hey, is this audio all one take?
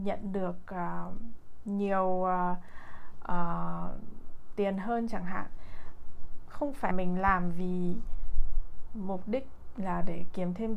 no; 1 cut; at 6.9 s

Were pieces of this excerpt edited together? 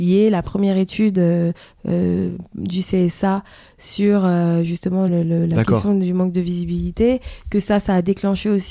no; 0 cuts

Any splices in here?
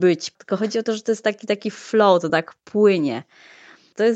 no; 0 cuts

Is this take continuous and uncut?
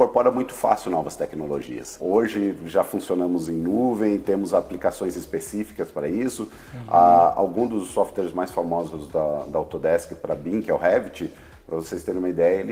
yes; 0 cuts

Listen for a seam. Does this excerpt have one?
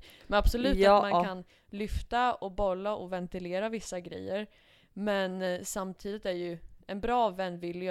no; 0 cuts

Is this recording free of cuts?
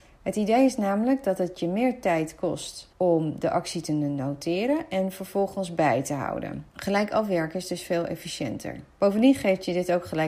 no; 3 cuts; at 2.9 s, 6.7 s, 8.9 s

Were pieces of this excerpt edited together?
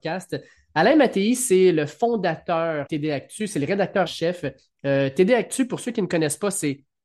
yes; 2 cuts; at 2.9 s, 4.1 s

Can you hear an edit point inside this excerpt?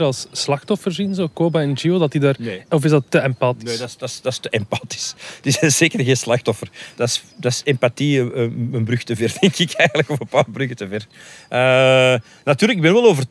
no; 0 cuts

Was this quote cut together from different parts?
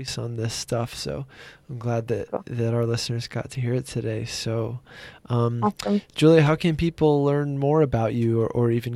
no; 0 cuts

